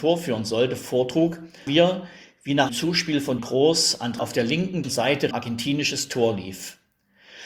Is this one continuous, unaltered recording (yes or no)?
no